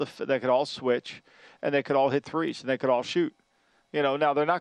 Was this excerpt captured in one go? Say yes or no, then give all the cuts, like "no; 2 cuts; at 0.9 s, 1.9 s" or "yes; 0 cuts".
yes; 0 cuts